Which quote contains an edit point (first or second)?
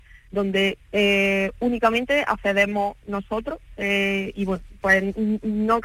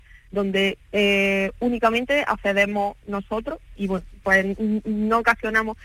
second